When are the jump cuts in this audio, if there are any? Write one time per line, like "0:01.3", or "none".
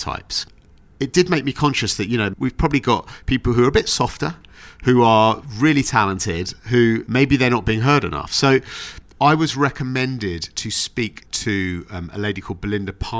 0:06.6